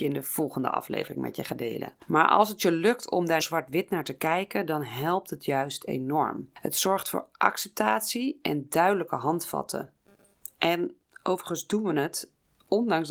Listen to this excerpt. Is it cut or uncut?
cut